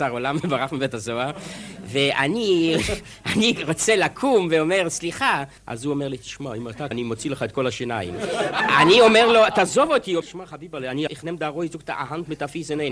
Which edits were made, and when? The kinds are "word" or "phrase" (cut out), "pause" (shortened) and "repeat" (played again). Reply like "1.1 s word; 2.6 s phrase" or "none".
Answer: 5.6 s pause; 6.9 s word; 10.2 s word; 11.1 s word